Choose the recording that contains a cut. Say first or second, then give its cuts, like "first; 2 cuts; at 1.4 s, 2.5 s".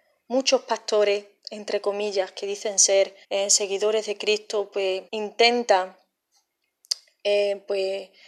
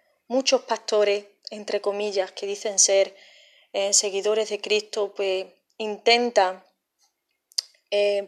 first; 2 cuts; at 3.2 s, 5.1 s